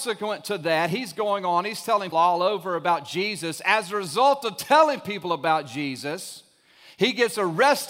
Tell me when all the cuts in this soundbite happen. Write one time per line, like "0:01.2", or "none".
0:02.1